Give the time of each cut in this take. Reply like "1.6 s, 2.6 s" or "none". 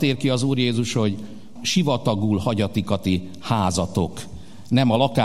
1.6 s